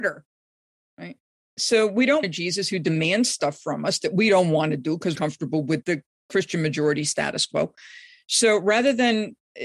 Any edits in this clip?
yes; 3 cuts; at 2.2 s, 5.2 s, 5.8 s

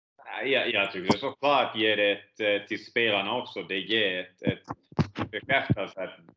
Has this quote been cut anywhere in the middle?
no; 0 cuts

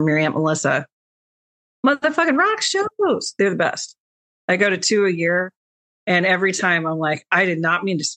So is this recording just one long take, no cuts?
yes; 0 cuts

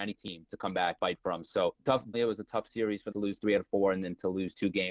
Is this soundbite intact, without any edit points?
no; 4 cuts; at 1.0 s, 1.8 s, 2.1 s, 3.1 s

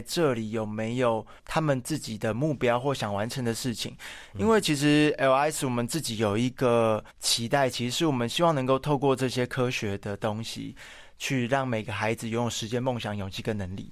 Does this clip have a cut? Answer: yes; 2 cuts; at 1.4 s, 7.1 s

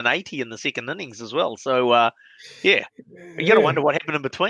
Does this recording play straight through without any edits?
yes; 0 cuts

